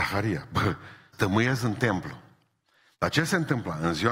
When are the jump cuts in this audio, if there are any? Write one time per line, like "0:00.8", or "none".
0:01.1

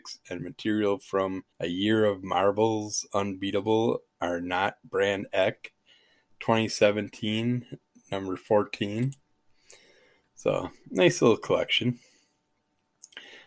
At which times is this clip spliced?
0:01.5

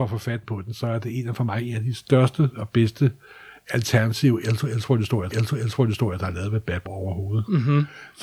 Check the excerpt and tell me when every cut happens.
0:05.3
0:06.9

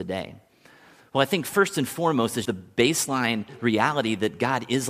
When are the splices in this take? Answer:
0:02.5

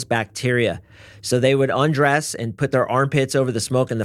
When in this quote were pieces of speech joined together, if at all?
none

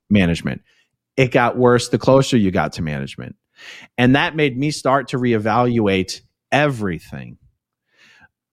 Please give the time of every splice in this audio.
none

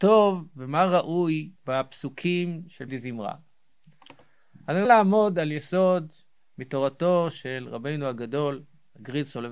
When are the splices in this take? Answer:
0:01.6
0:02.9
0:04.8

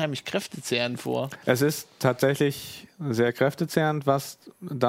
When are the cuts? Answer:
none

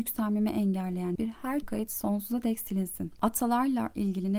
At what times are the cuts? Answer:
0:01.2
0:01.6

